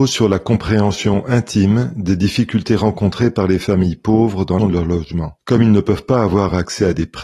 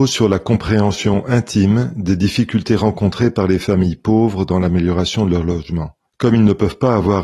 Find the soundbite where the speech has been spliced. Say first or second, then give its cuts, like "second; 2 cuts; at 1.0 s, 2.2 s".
first; 2 cuts; at 4.6 s, 5.4 s